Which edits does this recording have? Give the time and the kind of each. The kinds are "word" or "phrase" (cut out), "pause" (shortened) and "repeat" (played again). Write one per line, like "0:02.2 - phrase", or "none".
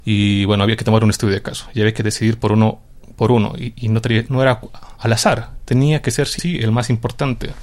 0:04.3 - word
0:06.4 - word